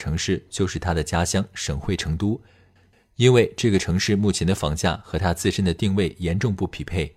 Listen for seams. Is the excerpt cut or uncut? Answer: uncut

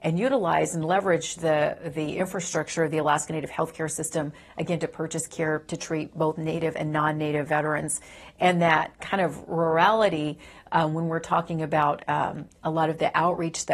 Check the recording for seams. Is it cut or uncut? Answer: uncut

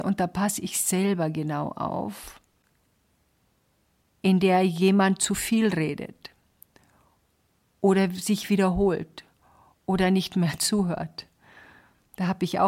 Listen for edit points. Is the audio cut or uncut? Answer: uncut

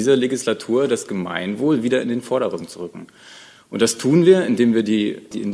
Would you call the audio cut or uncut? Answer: uncut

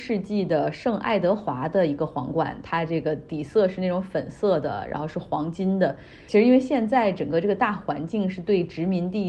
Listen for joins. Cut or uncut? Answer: uncut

